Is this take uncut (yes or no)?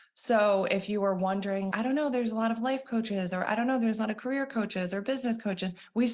no